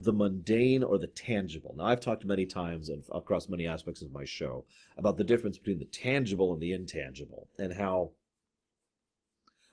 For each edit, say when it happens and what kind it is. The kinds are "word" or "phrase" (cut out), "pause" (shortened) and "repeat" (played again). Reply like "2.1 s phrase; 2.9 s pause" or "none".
none